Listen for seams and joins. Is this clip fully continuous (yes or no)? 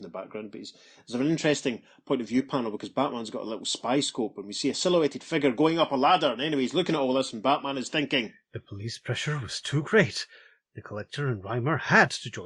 yes